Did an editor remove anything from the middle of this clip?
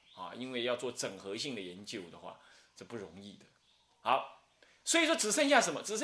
no; 0 cuts

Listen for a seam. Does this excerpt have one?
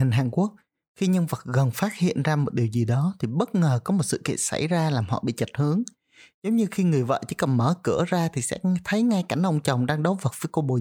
no; 0 cuts

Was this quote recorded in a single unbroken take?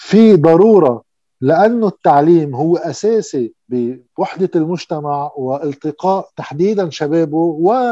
yes; 0 cuts

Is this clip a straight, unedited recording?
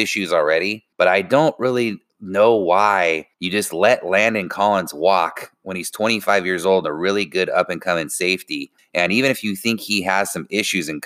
no; 3 cuts; at 0.9 s, 3.3 s, 8.8 s

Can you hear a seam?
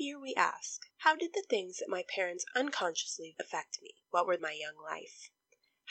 yes; 4 cuts; at 0.9 s, 3.3 s, 4.0 s, 4.4 s

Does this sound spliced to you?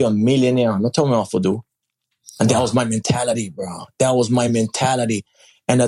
no; 0 cuts

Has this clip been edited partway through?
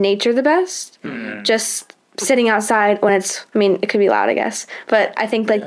no; 0 cuts

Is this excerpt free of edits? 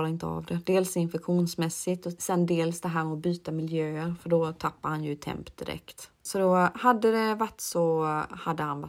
no; 1 cut; at 6.1 s

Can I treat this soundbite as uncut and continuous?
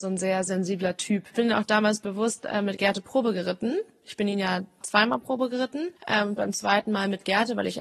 no; 1 cut; at 6.0 s

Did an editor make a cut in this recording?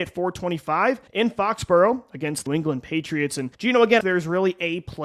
yes; 4 cuts; at 1.1 s, 2.5 s, 3.5 s, 4.0 s

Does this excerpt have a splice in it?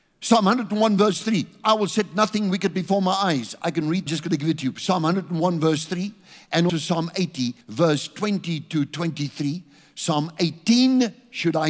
yes; 3 cuts; at 4.1 s, 6.7 s, 7.6 s

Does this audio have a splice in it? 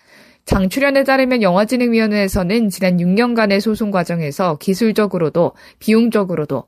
no; 0 cuts

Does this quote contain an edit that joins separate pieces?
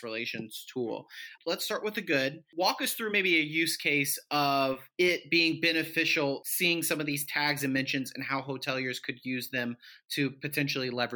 no; 0 cuts

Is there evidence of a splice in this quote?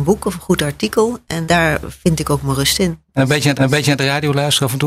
yes; 2 cuts; at 1.5 s, 3.6 s

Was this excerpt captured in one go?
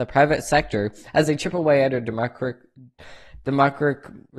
yes; 0 cuts

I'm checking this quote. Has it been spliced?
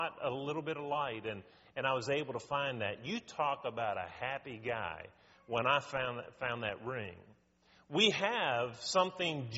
no; 0 cuts

